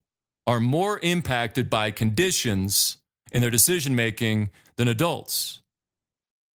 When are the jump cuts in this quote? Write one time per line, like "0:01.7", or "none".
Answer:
none